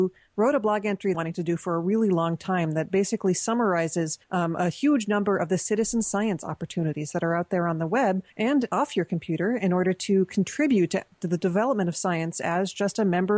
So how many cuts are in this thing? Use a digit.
3